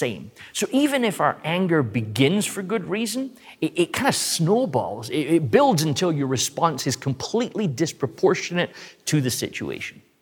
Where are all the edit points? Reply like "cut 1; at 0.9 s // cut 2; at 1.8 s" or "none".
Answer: none